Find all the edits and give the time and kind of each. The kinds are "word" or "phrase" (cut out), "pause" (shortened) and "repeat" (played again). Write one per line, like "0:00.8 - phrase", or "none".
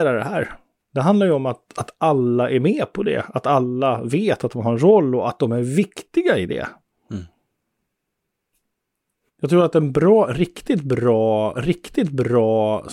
0:11.5 - repeat